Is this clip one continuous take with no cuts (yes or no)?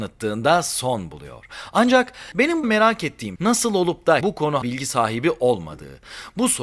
no